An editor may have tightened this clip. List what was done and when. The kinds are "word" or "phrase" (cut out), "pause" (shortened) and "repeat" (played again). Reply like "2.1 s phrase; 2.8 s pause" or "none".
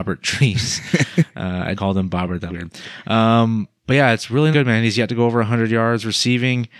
1.7 s word; 2.5 s word; 4.5 s word